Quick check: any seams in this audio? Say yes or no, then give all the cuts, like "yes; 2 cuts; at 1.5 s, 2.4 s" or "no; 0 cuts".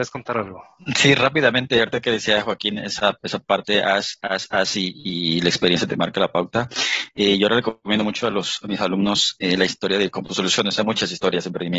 no; 0 cuts